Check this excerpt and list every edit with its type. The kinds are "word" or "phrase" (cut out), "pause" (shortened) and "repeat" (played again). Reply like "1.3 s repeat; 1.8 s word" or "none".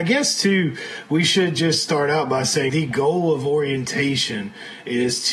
2.7 s word